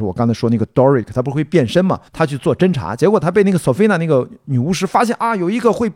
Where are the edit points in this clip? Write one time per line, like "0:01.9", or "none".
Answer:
0:02.1